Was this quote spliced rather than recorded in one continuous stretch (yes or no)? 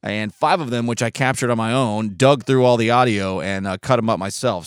no